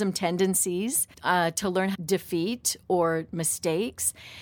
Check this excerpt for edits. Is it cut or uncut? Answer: cut